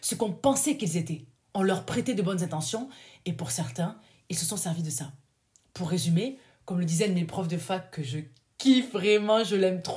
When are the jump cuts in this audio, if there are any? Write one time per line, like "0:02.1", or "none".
none